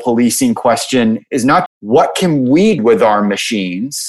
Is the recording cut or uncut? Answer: cut